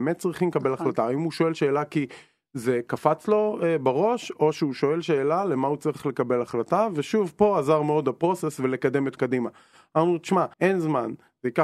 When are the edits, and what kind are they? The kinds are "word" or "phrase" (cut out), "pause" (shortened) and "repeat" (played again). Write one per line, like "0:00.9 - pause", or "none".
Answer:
0:09.2 - word
0:10.5 - pause